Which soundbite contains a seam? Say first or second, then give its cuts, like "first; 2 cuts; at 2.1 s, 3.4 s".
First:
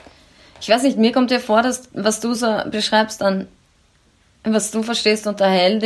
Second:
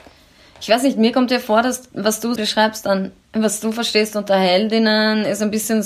second; 2 cuts; at 2.4 s, 3.2 s